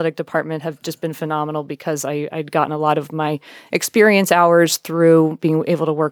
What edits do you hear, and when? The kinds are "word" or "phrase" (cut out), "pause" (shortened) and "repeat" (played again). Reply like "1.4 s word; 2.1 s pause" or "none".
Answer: none